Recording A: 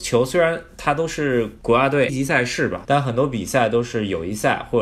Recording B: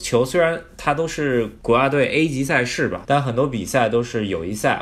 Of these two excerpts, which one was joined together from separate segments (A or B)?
A